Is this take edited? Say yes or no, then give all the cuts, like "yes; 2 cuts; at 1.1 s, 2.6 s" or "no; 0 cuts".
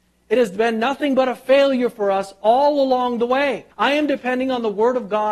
yes; 1 cut; at 3.7 s